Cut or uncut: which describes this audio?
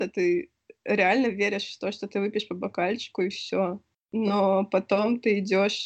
uncut